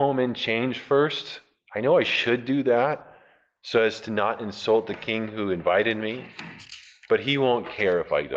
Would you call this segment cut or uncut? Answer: uncut